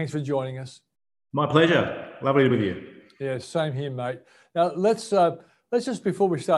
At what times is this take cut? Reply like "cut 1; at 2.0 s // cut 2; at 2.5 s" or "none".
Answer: cut 1; at 2.5 s